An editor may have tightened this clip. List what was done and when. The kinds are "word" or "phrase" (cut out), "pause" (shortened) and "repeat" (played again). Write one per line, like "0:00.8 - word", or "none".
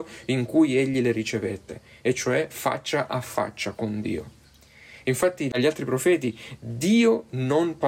none